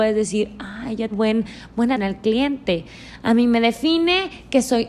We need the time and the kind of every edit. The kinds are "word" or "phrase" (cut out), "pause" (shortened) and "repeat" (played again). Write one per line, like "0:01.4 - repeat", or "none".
0:01.1 - word
0:02.0 - word